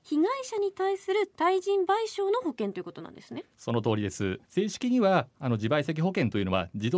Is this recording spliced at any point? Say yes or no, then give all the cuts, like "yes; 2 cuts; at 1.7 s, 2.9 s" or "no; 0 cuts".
yes; 1 cut; at 4.4 s